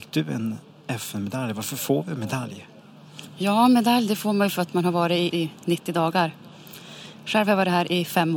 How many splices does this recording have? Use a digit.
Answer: 1